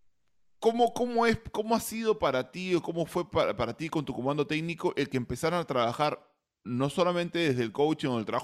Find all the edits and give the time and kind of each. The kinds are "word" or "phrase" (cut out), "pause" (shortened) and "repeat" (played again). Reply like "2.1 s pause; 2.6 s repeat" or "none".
none